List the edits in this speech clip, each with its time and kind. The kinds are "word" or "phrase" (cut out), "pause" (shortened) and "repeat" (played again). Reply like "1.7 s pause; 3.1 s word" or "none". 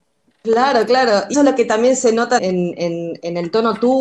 1.3 s word; 2.4 s word

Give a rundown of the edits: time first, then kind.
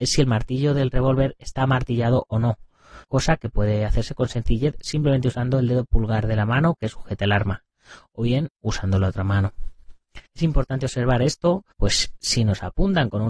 3.0 s pause; 10.3 s pause; 11.7 s pause

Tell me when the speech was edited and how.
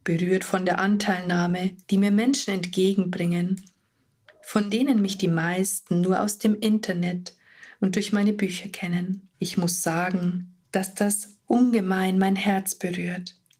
1.8 s pause; 9.3 s pause; 10.6 s pause

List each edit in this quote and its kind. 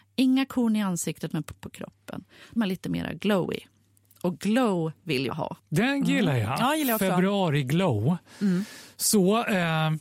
1.6 s word; 2.6 s word; 5.3 s word

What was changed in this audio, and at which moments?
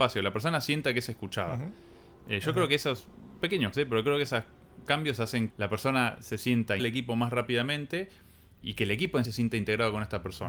3.4 s word; 3.7 s word; 4.9 s word; 5.5 s word; 6.8 s word; 8.6 s word; 9.2 s word

